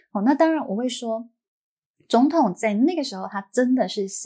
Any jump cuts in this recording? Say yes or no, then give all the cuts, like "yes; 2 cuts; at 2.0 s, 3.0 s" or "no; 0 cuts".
no; 0 cuts